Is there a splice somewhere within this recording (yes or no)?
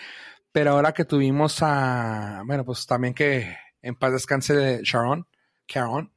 no